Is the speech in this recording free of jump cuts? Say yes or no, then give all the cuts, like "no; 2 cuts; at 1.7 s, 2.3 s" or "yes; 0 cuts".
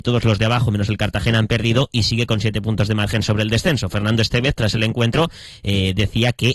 yes; 0 cuts